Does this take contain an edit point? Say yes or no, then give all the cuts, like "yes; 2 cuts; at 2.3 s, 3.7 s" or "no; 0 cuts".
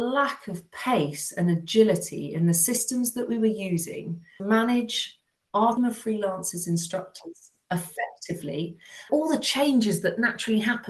yes; 3 cuts; at 4.4 s, 5.8 s, 9.1 s